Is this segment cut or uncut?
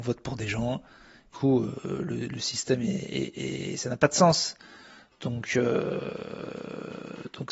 cut